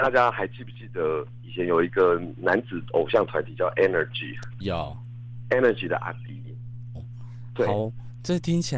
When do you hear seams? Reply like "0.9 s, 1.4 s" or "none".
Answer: 4.6 s, 6.9 s